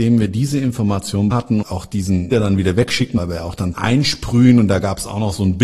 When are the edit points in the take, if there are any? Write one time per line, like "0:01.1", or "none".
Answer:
0:01.3
0:01.6
0:02.3
0:03.2
0:03.7